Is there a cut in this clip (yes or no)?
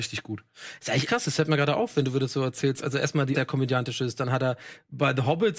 yes